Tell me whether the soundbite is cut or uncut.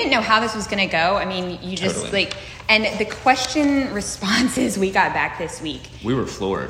uncut